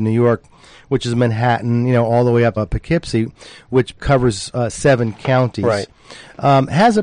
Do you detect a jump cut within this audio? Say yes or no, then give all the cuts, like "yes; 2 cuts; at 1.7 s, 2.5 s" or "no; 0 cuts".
yes; 2 cuts; at 2.6 s, 4.0 s